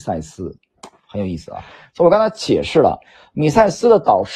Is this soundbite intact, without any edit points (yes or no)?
yes